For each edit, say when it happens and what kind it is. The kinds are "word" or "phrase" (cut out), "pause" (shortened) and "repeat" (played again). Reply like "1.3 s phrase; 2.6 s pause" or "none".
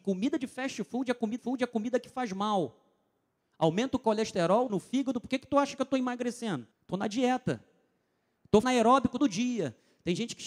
1.4 s repeat; 4.7 s phrase; 6.7 s pause; 8.6 s word; 9.2 s word